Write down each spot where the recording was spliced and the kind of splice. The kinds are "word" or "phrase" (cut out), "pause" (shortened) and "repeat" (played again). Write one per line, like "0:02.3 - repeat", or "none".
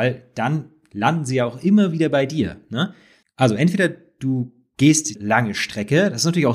0:03.2 - pause
0:05.1 - word